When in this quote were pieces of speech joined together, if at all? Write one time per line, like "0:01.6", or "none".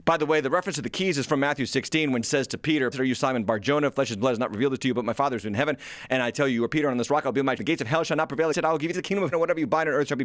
0:02.2
0:02.9
0:07.6
0:08.5
0:08.9
0:09.3

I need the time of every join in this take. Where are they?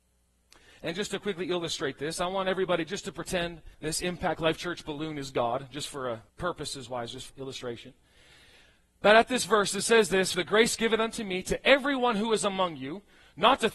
0:03.7
0:06.3
0:07.3
0:10.3

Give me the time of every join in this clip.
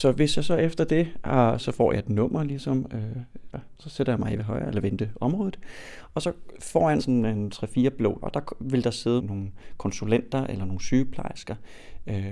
0:01.6
0:03.5
0:04.4
0:07.0
0:08.2
0:09.2

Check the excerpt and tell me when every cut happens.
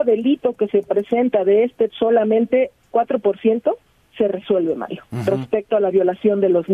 0:01.9
0:02.9

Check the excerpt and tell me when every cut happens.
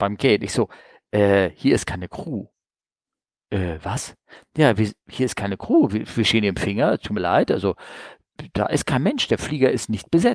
none

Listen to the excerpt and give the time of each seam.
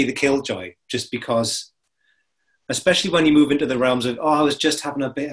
none

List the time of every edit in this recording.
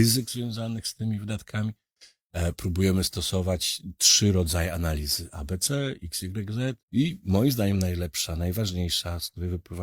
0:06.8

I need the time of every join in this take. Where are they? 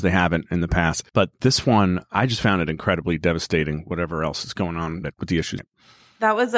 0:01.1
0:05.0
0:05.6

